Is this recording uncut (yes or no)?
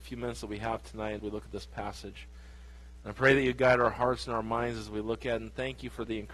no